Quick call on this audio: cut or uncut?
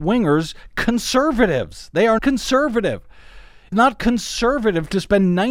cut